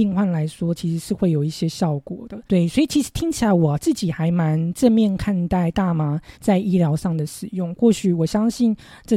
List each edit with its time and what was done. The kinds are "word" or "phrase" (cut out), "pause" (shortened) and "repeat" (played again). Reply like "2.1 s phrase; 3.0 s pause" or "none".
2.5 s pause; 6.3 s pause